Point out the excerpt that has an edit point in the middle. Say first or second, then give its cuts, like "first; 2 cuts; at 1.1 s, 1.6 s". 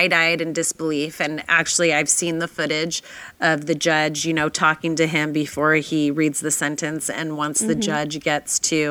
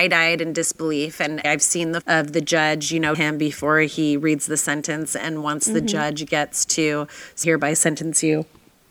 second; 4 cuts; at 1.4 s, 2.0 s, 3.1 s, 7.4 s